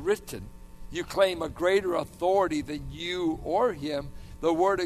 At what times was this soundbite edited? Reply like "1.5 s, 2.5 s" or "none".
none